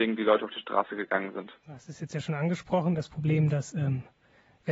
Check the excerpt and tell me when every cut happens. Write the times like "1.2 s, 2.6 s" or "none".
1.6 s